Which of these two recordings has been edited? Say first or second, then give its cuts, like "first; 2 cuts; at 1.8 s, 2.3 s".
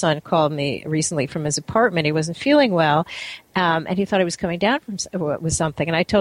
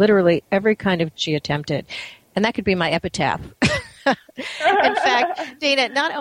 second; 1 cut; at 1.1 s